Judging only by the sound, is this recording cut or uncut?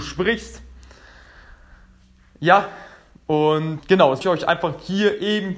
cut